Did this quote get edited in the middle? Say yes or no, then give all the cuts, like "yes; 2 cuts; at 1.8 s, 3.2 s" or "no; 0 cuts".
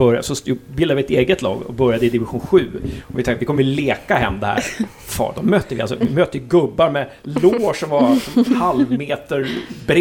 no; 0 cuts